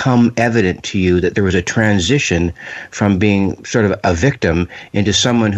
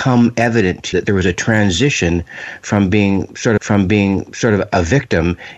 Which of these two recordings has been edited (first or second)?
second